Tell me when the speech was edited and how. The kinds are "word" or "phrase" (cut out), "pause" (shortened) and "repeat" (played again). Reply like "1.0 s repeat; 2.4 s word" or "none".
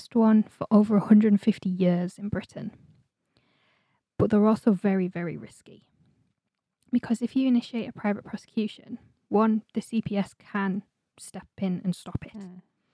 none